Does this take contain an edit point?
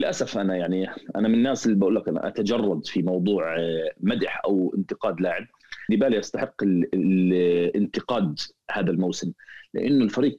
yes; 1 cut; at 5.9 s

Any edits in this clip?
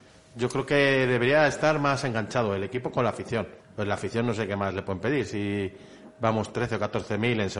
yes; 1 cut; at 3.6 s

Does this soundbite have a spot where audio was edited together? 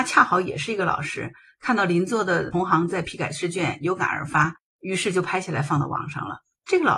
no; 0 cuts

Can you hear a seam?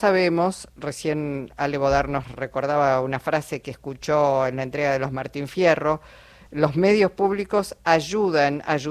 no; 0 cuts

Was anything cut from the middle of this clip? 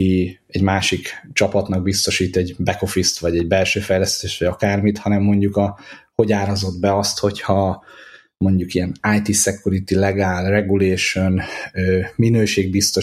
no; 0 cuts

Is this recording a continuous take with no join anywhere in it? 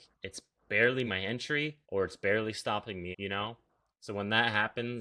no; 3 cuts; at 1.1 s, 1.8 s, 3.1 s

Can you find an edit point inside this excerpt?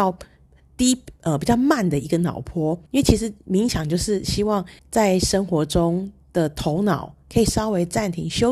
yes; 2 cuts; at 2.9 s, 4.8 s

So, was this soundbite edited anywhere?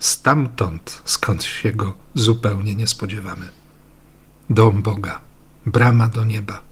no; 0 cuts

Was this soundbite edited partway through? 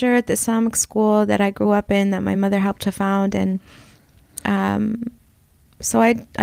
no; 0 cuts

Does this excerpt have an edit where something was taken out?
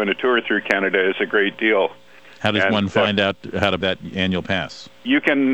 yes; 1 cut; at 3.8 s

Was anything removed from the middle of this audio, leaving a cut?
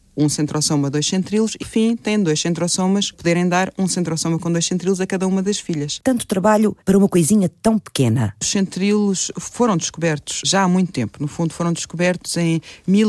yes; 4 cuts; at 1.6 s, 3.1 s, 6.8 s, 10.4 s

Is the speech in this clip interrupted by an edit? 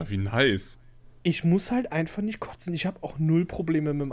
no; 0 cuts

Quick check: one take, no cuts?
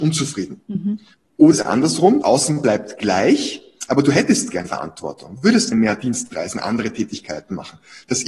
no; 4 cuts; at 1.5 s, 2.2 s, 4.7 s, 5.7 s

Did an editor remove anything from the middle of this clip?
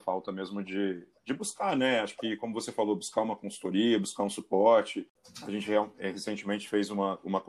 no; 0 cuts

